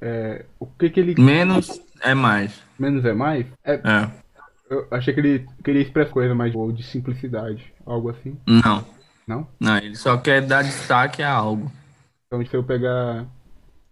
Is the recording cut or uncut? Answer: cut